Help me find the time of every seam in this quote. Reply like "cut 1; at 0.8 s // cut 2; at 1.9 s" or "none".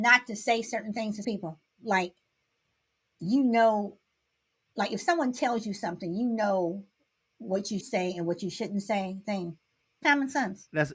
cut 1; at 1.2 s // cut 2; at 7.8 s // cut 3; at 9.2 s // cut 4; at 10.0 s